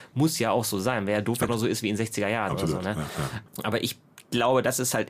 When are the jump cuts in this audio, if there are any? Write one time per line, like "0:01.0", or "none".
0:01.5
0:03.5

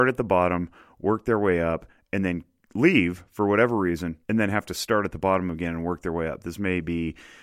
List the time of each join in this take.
0:04.2

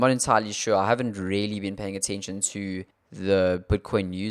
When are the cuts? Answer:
0:02.9

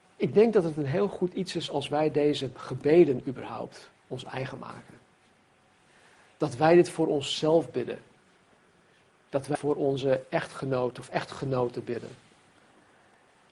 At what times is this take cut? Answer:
0:09.5

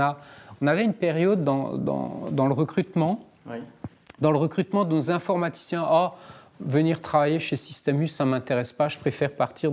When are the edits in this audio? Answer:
none

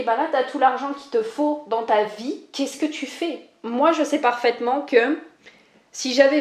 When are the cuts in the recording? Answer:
none

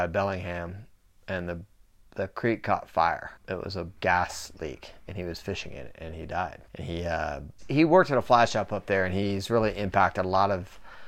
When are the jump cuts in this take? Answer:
0:03.4
0:04.0
0:06.7

